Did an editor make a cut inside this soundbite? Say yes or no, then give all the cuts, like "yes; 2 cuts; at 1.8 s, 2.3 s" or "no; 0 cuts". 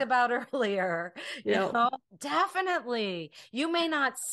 no; 0 cuts